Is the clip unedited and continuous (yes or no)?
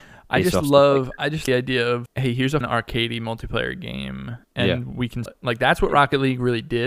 no